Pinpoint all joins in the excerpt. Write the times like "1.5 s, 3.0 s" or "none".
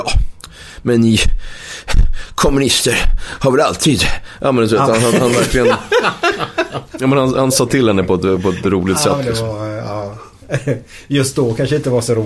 none